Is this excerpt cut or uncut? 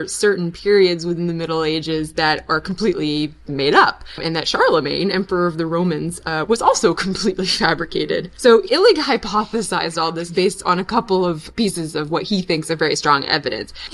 uncut